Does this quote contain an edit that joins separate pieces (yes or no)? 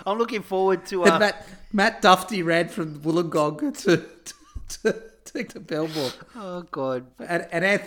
yes